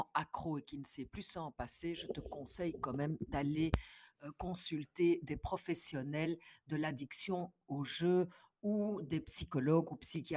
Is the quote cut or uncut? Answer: uncut